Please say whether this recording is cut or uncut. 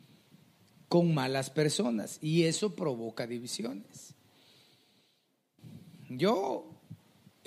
uncut